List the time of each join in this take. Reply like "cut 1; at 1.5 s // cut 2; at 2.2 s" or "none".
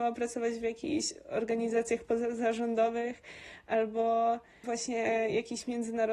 none